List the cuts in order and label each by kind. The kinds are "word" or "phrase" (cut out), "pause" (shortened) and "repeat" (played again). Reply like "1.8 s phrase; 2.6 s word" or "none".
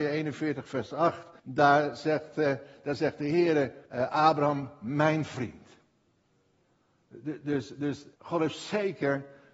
1.4 s pause; 3.8 s pause; 8.1 s pause